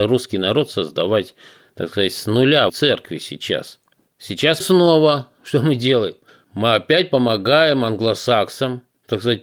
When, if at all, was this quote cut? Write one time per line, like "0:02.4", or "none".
0:02.7
0:04.6
0:06.3